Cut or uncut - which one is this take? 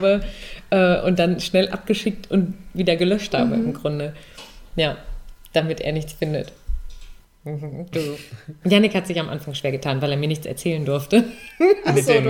uncut